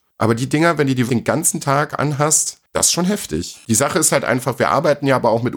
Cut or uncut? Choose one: cut